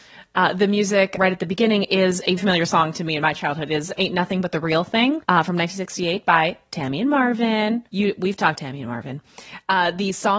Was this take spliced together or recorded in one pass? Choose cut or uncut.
cut